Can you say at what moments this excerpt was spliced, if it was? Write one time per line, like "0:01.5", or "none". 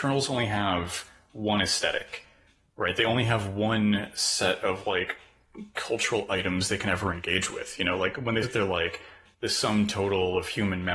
0:08.4